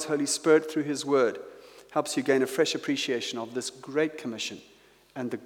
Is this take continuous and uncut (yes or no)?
yes